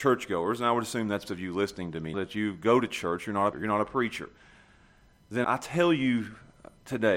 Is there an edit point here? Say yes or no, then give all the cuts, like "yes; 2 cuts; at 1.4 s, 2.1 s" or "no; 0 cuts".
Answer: yes; 4 cuts; at 1.2 s, 2.1 s, 3.5 s, 5.4 s